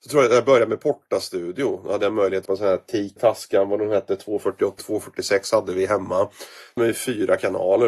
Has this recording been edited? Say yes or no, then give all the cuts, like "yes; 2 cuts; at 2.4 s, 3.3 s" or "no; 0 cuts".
yes; 4 cuts; at 2.5 s, 3.2 s, 4.8 s, 6.8 s